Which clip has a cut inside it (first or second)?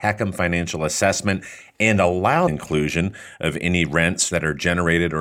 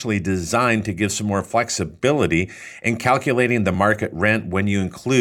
first